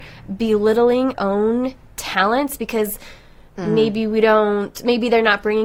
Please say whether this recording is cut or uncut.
cut